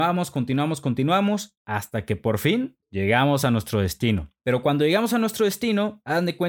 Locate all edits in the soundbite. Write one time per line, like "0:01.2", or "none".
0:02.8
0:04.4

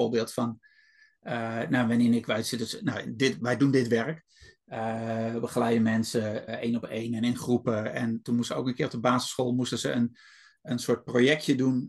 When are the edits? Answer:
0:06.5

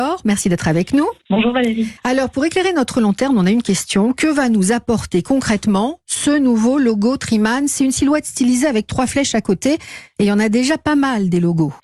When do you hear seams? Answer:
0:02.0

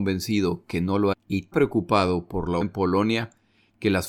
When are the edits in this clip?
0:01.1
0:01.5
0:02.6

